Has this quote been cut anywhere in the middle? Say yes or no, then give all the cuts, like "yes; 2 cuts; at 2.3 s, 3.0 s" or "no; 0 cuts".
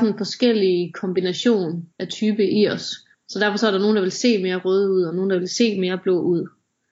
yes; 2 cuts; at 1.9 s, 3.1 s